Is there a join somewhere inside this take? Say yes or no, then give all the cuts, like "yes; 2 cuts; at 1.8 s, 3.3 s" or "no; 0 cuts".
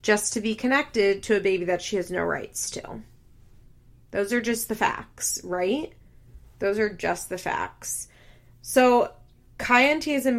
no; 0 cuts